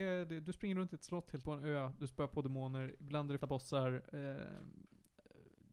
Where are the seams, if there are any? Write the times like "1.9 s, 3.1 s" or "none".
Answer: 1.4 s, 3.4 s

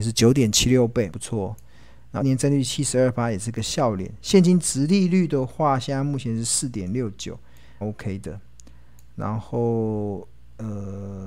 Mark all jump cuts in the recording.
1.1 s, 2.2 s, 7.8 s

